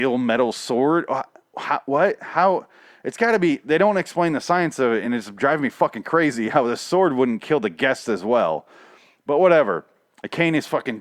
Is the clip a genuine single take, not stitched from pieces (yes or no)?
yes